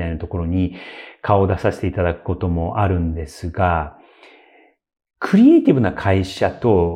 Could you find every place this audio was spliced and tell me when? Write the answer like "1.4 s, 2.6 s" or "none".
none